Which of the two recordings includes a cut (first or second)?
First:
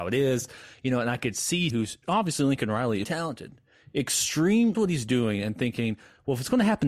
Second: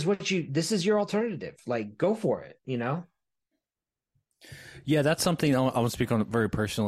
first